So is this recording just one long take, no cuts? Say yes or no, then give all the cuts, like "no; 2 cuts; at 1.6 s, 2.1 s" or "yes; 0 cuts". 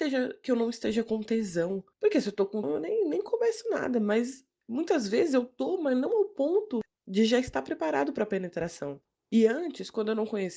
no; 3 cuts; at 1.9 s, 2.6 s, 9.1 s